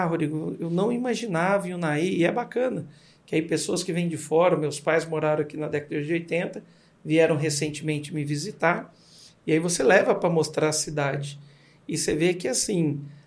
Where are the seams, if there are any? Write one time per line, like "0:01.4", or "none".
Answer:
none